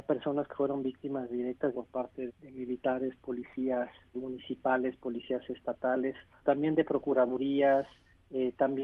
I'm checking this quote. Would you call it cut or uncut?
cut